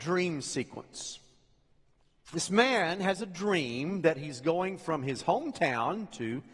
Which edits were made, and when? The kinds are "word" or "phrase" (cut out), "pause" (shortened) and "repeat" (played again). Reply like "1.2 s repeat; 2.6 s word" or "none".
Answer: none